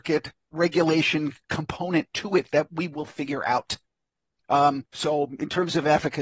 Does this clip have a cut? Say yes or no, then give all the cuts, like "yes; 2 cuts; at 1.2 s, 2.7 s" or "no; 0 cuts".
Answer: yes; 2 cuts; at 1.4 s, 4.9 s